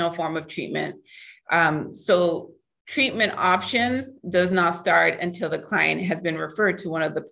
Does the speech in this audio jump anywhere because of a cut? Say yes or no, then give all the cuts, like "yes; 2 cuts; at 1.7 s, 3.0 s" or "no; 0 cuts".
no; 0 cuts